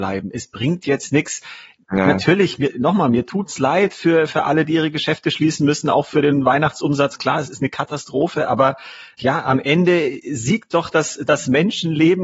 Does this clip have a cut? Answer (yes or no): no